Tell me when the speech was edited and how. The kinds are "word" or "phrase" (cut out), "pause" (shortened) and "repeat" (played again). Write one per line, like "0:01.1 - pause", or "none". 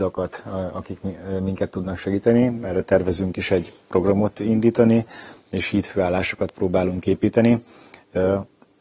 none